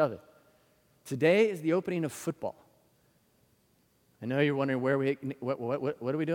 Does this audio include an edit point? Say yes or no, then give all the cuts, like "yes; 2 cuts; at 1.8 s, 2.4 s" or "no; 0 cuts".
no; 0 cuts